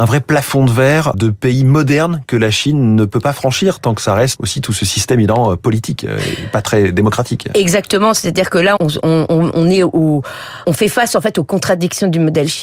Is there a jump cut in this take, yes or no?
yes